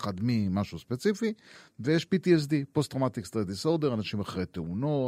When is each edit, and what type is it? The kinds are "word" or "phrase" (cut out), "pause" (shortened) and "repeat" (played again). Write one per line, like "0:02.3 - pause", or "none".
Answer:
none